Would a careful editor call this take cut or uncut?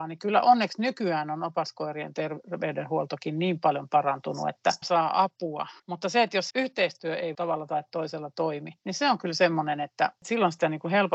cut